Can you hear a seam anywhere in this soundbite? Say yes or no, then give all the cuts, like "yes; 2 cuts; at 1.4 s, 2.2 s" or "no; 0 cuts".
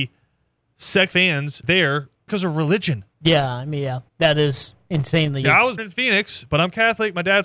yes; 7 cuts; at 1.1 s, 1.6 s, 2.3 s, 3.1 s, 4.1 s, 5.4 s, 5.8 s